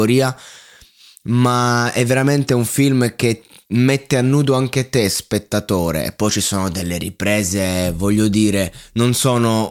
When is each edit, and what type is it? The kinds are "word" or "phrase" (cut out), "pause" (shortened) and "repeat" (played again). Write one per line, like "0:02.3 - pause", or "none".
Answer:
none

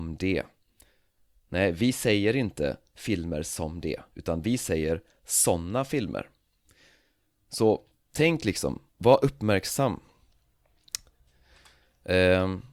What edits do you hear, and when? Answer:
0:07.9 - pause
0:08.9 - pause

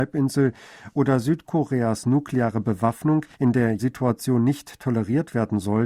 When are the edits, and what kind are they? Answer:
0:03.3 - pause
0:03.8 - word

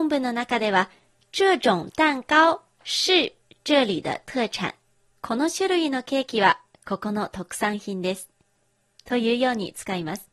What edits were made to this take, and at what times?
0:04.9 - pause

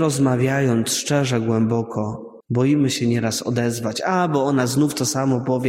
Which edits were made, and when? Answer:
0:02.4 - pause

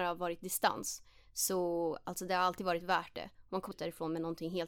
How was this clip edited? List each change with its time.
0:03.7 - word

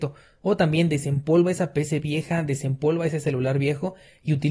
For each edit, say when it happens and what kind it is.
none

